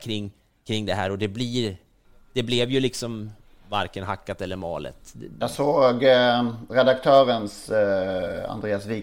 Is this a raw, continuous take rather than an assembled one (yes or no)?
yes